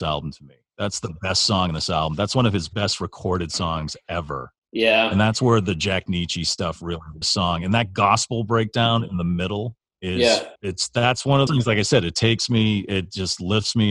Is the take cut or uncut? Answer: cut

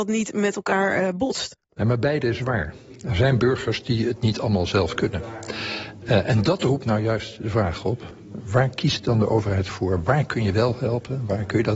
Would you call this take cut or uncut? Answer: uncut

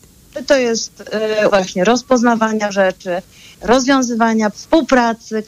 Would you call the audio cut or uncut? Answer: cut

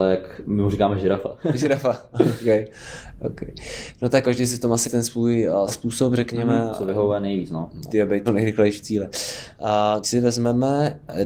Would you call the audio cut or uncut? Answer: cut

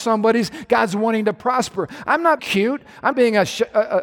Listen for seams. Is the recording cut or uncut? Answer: cut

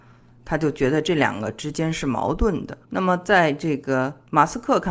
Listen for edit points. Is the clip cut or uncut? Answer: cut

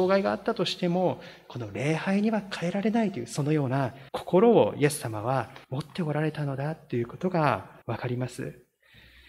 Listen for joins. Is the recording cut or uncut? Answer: cut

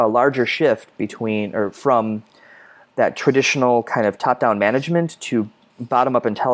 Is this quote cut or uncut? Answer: uncut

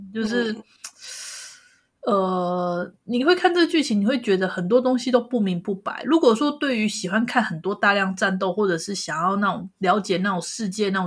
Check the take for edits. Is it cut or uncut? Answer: uncut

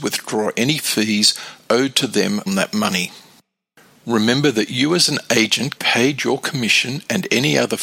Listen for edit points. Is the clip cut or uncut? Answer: cut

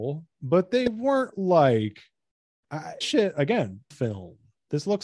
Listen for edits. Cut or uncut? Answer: cut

